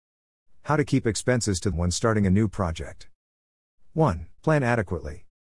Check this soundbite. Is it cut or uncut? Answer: cut